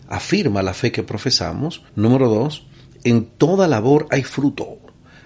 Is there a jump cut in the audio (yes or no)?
yes